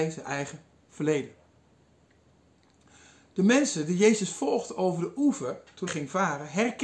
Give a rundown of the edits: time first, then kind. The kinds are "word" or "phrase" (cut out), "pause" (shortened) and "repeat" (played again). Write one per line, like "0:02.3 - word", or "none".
0:05.9 - word

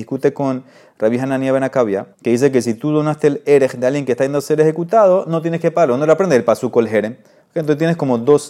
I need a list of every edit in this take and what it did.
0:02.1 - pause

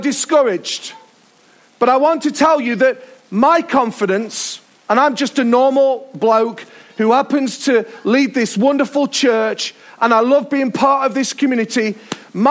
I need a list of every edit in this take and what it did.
none

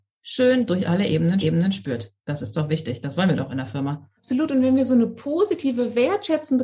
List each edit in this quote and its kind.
0:01.4 - repeat
0:04.2 - pause

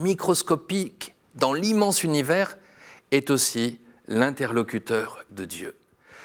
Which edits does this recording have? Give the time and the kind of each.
0:05.3 - word

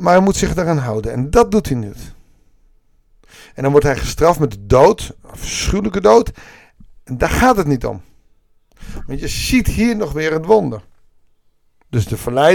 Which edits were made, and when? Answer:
none

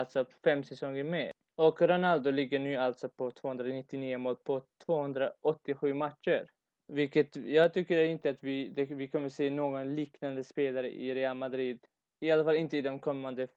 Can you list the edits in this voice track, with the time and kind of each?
none

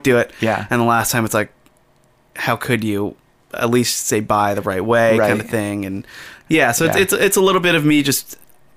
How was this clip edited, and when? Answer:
none

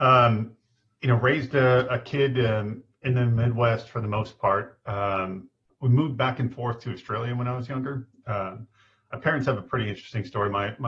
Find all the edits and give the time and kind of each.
none

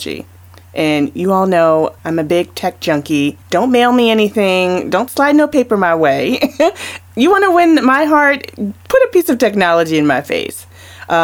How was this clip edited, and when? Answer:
0:02.0 - pause
0:03.4 - pause

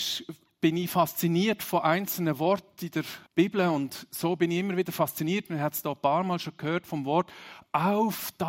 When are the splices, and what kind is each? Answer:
0:03.3 - pause

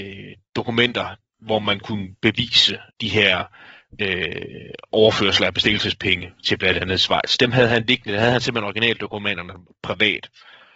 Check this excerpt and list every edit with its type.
0:02.9 - pause

